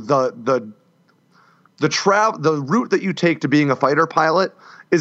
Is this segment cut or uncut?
uncut